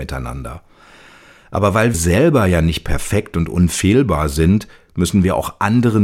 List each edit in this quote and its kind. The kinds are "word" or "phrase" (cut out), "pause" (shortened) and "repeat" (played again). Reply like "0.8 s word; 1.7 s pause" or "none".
1.9 s word